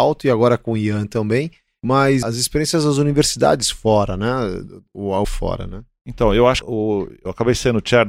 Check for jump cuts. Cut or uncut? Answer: cut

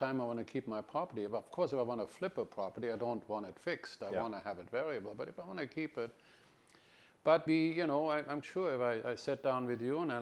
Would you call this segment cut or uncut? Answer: cut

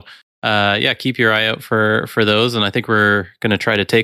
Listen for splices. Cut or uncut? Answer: uncut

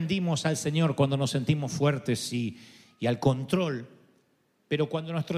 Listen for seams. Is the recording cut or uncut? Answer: uncut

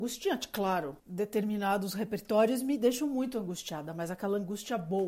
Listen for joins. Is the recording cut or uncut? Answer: cut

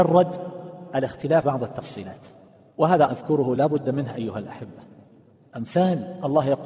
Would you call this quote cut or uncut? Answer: cut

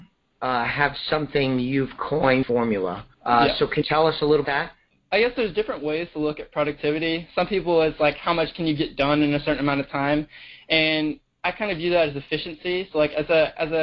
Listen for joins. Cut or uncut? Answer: cut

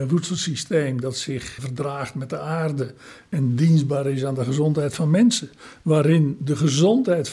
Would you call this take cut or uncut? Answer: cut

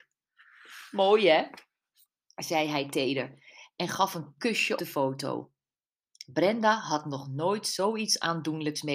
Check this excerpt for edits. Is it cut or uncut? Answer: cut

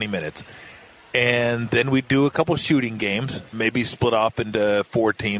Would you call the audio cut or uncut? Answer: cut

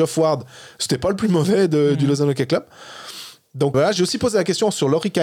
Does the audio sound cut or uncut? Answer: cut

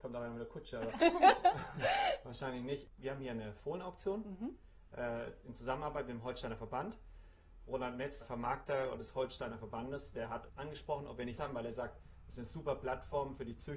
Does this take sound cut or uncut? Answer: cut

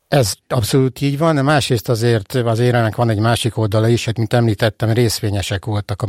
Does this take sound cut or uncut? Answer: uncut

